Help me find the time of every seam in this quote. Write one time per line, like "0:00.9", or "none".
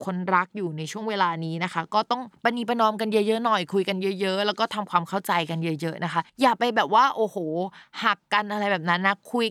0:06.3